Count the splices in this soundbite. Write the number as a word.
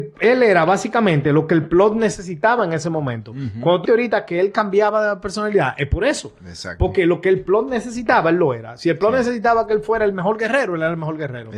one